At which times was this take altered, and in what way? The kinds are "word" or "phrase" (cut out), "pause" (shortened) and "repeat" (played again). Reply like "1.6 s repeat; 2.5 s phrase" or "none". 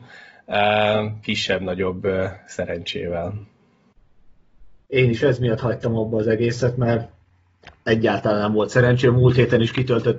4.8 s pause